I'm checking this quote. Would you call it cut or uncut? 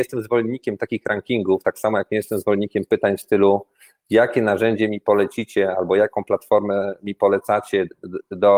uncut